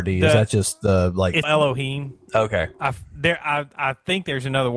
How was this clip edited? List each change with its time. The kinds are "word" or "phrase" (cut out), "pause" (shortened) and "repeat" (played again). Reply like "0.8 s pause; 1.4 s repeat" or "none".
1.4 s word